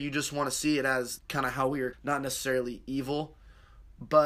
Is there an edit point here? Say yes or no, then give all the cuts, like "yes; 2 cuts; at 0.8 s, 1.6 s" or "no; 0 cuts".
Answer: yes; 2 cuts; at 1.2 s, 1.9 s